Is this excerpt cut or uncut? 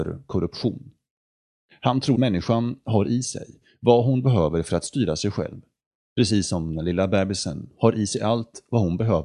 cut